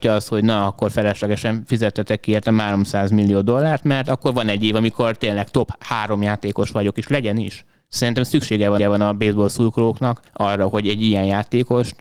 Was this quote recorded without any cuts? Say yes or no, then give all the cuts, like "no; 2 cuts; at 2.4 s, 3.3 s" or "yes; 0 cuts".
no; 2 cuts; at 8.8 s, 10.3 s